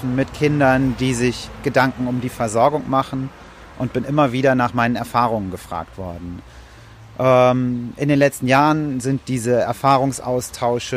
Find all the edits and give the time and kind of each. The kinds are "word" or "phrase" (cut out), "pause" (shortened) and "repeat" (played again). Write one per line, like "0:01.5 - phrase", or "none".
none

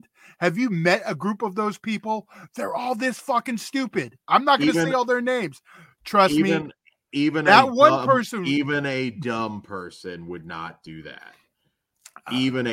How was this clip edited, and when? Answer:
none

